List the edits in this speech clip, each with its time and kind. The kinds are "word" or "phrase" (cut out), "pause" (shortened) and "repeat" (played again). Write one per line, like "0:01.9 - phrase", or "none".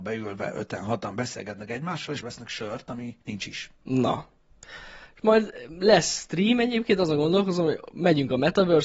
0:02.2 - word
0:03.2 - pause
0:03.8 - pause